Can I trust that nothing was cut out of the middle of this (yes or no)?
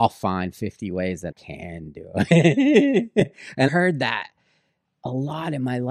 no